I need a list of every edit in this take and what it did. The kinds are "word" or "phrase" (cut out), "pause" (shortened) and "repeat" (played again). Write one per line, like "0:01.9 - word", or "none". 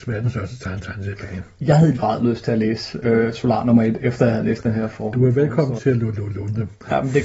0:02.0 - word
0:05.8 - word